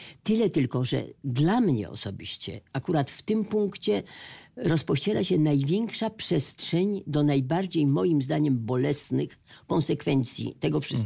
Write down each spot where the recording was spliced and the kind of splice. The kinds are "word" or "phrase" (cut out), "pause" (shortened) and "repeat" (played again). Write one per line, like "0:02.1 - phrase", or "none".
none